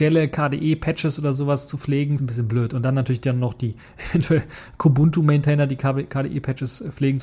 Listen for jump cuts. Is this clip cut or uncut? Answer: cut